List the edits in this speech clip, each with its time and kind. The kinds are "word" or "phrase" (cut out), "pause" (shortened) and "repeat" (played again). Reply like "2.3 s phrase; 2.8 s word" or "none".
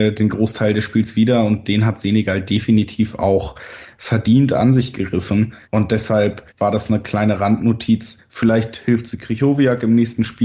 5.6 s pause; 6.5 s pause

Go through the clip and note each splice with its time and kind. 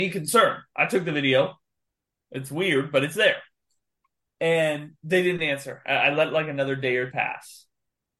7.1 s word

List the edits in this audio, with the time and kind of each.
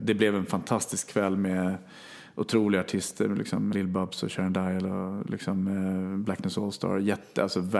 3.7 s word

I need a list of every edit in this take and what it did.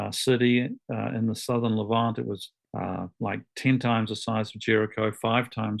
2.6 s pause

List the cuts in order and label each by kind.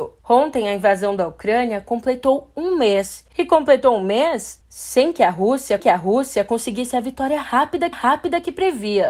5.8 s repeat; 7.9 s repeat

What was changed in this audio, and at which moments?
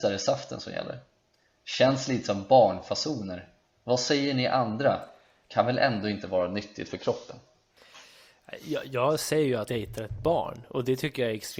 9.7 s word

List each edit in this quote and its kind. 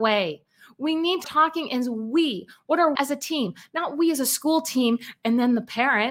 1.2 s word; 3.0 s word

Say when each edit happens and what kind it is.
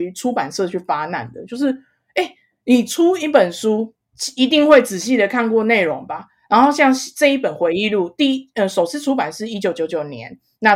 none

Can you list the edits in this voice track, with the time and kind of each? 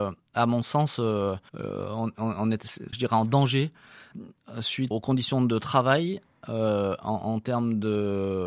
1.5 s pause; 2.9 s phrase; 4.9 s word

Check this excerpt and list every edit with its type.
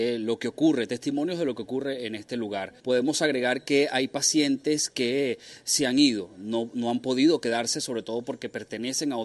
2.8 s pause

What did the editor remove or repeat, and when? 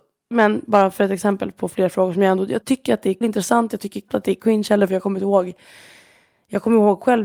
2.6 s word; 3.2 s word; 4.1 s word

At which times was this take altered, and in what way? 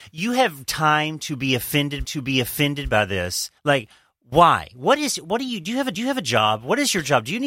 2.0 s repeat; 3.6 s pause; 5.9 s repeat

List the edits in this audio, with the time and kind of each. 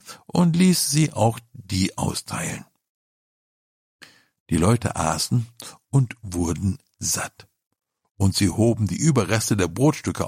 none

